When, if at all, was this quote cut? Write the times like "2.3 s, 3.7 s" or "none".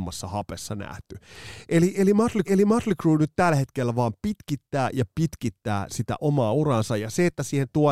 2.4 s, 6.2 s